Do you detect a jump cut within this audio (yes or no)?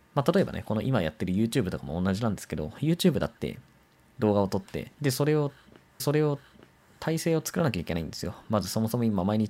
yes